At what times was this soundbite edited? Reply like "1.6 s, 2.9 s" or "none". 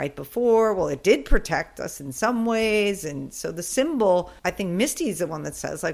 4.4 s